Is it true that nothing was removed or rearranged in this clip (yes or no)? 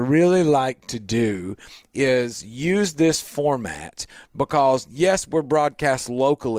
yes